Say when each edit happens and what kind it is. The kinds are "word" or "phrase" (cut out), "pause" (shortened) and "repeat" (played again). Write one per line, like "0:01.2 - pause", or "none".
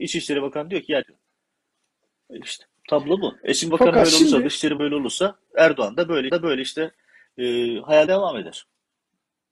0:01.0 - phrase
0:03.7 - word
0:04.8 - word
0:06.3 - repeat
0:08.1 - phrase